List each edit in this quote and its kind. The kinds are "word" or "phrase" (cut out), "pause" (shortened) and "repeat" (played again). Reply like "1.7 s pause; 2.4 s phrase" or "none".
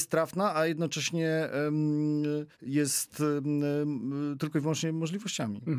2.5 s pause